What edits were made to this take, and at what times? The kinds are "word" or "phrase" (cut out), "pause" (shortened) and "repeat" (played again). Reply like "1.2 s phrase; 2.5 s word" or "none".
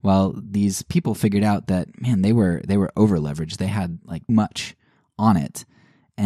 4.3 s word